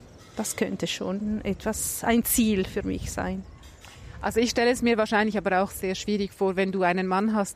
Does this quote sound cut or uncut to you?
uncut